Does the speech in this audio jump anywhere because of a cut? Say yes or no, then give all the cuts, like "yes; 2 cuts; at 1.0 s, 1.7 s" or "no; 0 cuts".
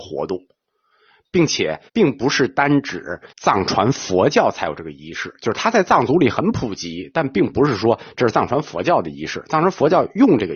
yes; 2 cuts; at 1.9 s, 3.3 s